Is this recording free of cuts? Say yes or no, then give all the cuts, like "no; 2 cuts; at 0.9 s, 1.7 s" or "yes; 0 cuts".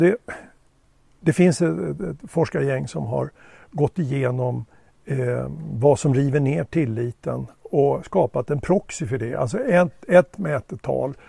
yes; 0 cuts